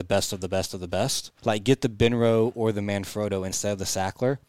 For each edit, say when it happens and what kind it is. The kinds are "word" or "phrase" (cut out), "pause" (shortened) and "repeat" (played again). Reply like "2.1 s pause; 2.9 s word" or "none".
1.4 s pause